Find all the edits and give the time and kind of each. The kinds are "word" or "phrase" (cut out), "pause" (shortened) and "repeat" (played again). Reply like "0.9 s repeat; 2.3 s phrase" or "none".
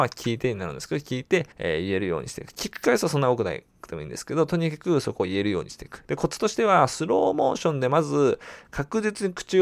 1.5 s pause

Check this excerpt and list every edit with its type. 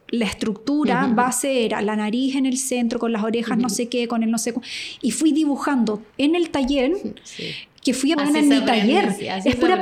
6.1 s phrase; 8.1 s word

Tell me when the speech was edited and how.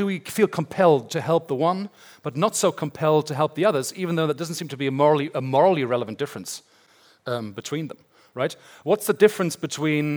none

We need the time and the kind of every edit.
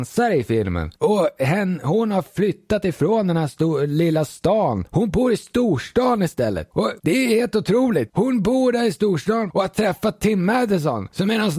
none

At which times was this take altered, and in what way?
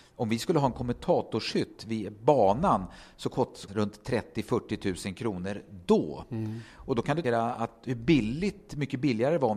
3.7 s phrase; 7.2 s word

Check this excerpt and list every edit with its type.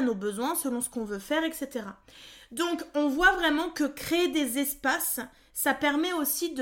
none

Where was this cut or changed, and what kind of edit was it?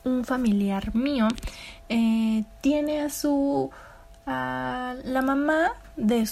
none

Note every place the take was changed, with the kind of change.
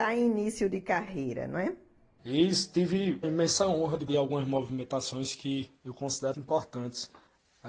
3.2 s word; 4.1 s word; 6.3 s word

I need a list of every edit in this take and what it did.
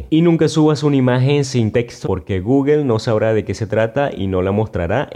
1.7 s phrase; 2.0 s word

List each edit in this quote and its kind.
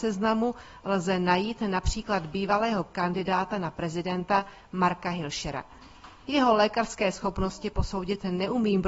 none

